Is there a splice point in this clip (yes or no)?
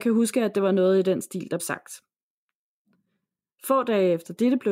yes